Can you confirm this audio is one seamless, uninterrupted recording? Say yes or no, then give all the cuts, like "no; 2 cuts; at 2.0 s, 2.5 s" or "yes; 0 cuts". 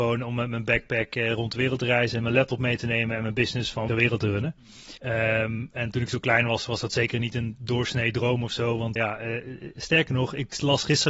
no; 3 cuts; at 3.9 s, 5.0 s, 9.0 s